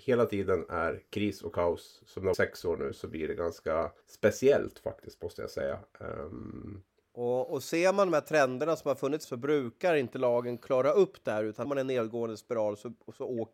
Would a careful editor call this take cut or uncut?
cut